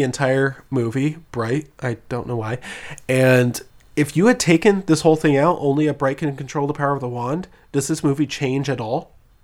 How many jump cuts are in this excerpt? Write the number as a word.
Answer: one